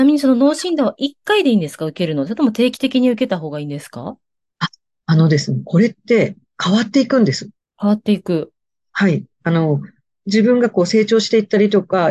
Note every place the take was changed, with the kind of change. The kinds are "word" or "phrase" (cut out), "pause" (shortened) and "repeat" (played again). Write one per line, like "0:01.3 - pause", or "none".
0:07.6 - pause